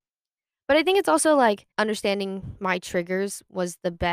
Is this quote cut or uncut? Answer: cut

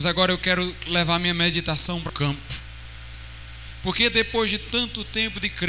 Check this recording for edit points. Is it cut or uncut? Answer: cut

